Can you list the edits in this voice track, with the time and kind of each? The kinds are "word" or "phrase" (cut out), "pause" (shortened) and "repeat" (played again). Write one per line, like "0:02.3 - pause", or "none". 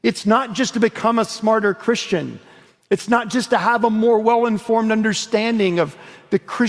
none